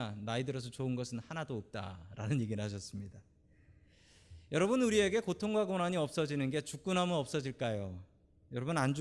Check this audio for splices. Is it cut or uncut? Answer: uncut